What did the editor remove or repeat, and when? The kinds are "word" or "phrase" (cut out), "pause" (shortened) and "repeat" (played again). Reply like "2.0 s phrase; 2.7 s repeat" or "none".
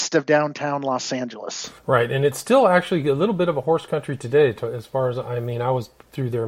1.8 s pause